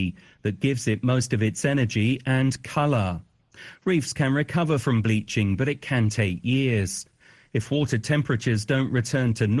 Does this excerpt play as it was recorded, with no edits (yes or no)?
yes